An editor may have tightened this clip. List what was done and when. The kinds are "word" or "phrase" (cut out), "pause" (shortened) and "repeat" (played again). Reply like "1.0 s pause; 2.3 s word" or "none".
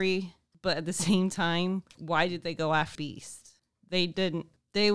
1.9 s word; 2.9 s word

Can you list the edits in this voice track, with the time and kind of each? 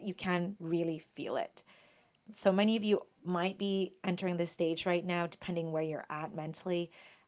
none

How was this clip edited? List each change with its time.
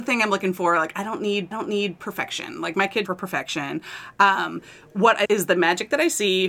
1.5 s repeat; 3.0 s phrase; 5.2 s word

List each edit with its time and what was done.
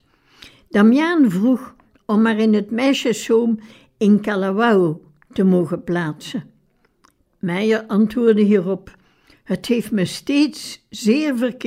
none

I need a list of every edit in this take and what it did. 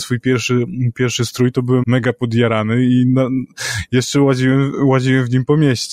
1.8 s word

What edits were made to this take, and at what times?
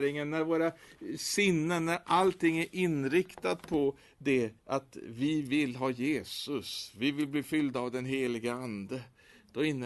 4.6 s pause

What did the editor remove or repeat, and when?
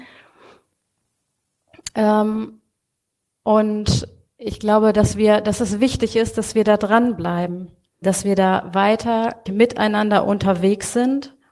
8.0 s word; 9.5 s word

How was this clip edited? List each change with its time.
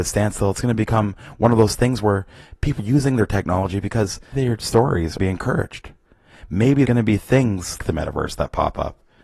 2.8 s word; 4.3 s word; 5.2 s phrase; 6.8 s word; 7.8 s word

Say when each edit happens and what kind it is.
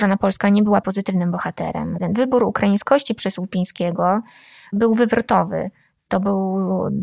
none

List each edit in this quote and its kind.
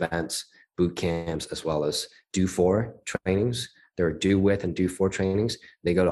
none

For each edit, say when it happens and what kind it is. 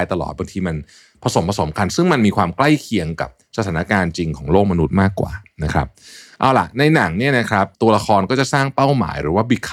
7.7 s pause

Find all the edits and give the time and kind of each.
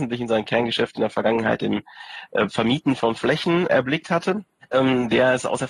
4.6 s pause

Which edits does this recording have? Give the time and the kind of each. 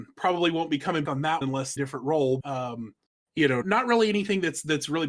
1.1 s word; 1.4 s word; 1.8 s phrase; 2.4 s word; 3.1 s pause; 3.6 s word

